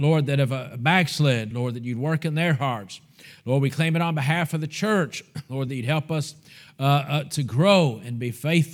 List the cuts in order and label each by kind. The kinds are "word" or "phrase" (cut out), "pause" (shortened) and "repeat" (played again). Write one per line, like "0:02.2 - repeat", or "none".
none